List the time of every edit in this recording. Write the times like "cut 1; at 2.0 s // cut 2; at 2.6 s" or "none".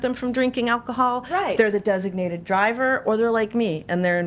none